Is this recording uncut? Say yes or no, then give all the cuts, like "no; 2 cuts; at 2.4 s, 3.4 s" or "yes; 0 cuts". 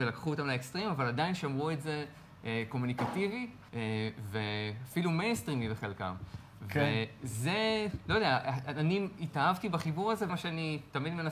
no; 2 cuts; at 3.7 s, 10.3 s